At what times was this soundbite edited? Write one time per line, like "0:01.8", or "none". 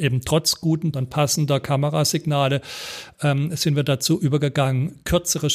0:00.9